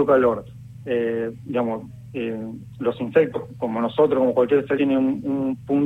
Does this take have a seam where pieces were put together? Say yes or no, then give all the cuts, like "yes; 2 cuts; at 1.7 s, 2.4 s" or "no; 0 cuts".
yes; 1 cut; at 4.8 s